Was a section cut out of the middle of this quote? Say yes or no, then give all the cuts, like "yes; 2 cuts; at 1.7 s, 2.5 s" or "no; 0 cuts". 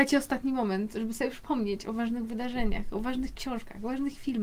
no; 0 cuts